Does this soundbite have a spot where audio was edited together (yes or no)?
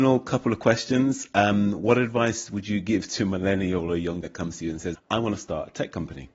yes